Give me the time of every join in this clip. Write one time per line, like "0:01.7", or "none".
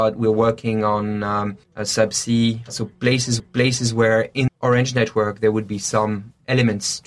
0:01.6
0:03.4
0:04.5

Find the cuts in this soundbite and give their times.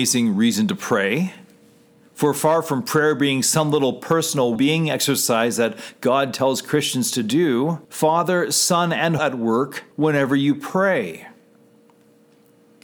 0:04.6
0:07.8
0:09.2
0:09.9

